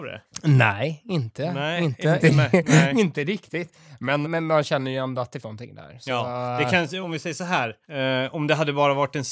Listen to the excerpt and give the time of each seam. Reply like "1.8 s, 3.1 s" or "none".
2.2 s, 4.2 s, 5.4 s, 7.0 s, 7.8 s